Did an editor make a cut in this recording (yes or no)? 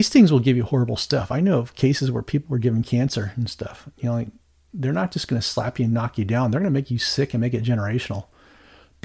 no